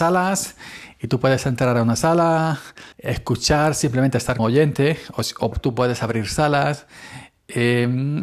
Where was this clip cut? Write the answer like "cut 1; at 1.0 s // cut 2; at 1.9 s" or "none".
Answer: cut 1; at 2.9 s // cut 2; at 4.4 s // cut 3; at 5.5 s